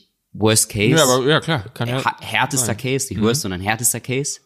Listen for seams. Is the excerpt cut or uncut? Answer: uncut